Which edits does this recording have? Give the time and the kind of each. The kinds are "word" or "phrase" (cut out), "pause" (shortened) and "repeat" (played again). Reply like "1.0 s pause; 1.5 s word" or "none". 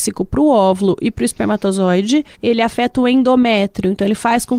2.3 s pause